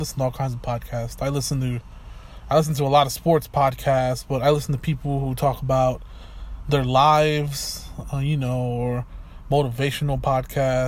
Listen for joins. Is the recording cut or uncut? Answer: uncut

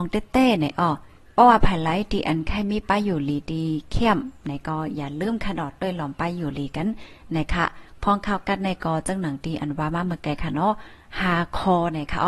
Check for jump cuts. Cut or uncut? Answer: cut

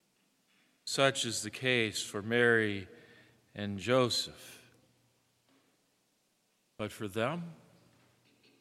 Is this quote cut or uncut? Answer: uncut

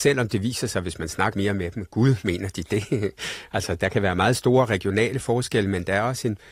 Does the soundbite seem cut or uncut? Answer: cut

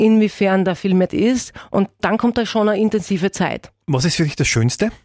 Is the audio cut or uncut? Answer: cut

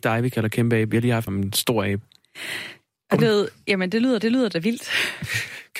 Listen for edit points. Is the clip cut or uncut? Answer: cut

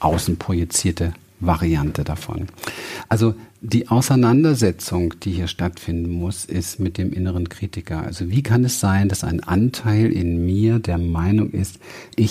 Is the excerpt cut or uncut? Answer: uncut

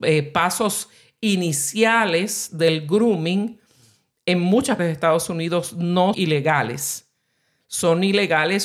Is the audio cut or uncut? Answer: cut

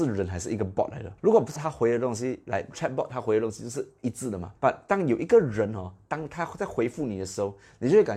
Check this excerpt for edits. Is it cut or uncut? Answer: cut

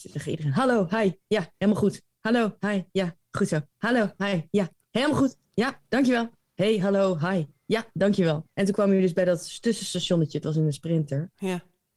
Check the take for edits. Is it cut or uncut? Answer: cut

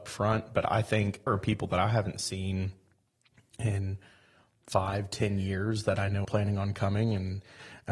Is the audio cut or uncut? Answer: cut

